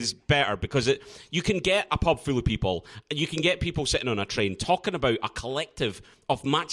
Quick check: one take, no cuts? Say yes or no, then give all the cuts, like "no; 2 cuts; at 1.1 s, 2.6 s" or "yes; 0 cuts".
yes; 0 cuts